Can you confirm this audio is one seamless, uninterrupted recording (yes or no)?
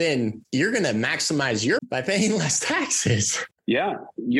no